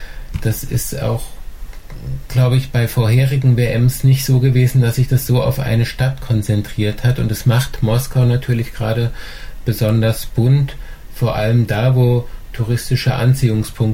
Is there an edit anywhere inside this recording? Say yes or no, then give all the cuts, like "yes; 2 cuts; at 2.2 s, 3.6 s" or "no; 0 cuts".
no; 0 cuts